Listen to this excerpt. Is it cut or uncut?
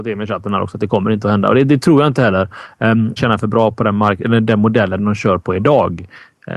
cut